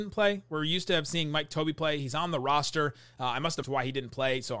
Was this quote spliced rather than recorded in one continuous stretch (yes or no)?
yes